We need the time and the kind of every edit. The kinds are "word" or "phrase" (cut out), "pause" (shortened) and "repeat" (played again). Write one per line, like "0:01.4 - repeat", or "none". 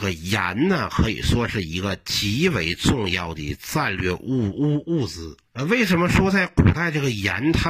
0:05.5 - pause